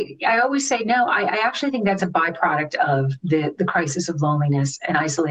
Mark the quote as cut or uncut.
uncut